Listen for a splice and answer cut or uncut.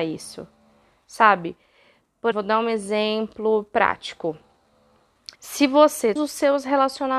cut